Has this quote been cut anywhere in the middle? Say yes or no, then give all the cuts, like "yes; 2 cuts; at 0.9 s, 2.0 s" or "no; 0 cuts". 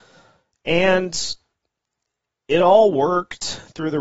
no; 0 cuts